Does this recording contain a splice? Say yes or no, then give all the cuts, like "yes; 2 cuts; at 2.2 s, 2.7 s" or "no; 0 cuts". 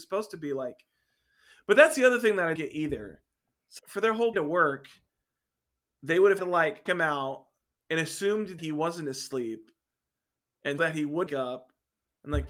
yes; 8 cuts; at 2.6 s, 3.8 s, 4.3 s, 6.4 s, 6.9 s, 8.6 s, 10.8 s, 11.3 s